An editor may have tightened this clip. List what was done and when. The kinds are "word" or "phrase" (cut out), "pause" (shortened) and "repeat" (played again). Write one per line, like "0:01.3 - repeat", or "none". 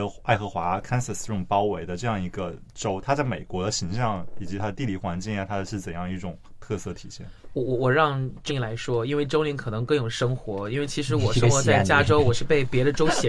0:08.5 - word

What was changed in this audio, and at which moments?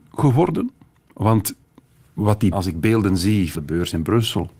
0:02.5 - word
0:03.5 - word

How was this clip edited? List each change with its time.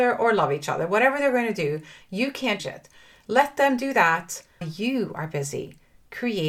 0:02.6 - word
0:04.6 - word

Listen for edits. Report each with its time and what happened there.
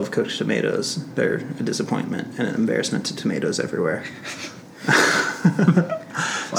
none

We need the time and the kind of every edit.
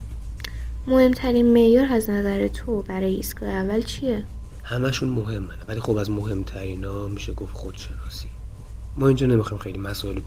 0:08.9 - word

